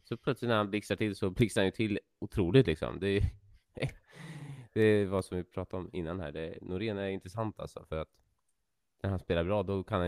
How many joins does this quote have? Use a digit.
0